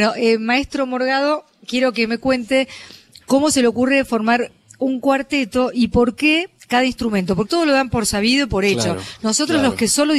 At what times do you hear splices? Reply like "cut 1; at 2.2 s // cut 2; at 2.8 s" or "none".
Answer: cut 1; at 7.5 s